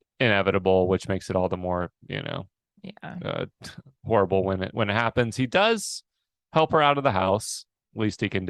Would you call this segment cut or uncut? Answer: uncut